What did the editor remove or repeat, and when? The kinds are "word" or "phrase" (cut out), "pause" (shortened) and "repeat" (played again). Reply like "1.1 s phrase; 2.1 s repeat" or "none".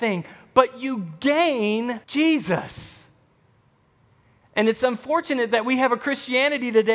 2.0 s pause